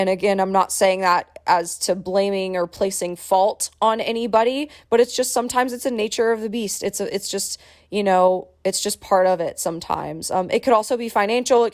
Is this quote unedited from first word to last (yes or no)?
yes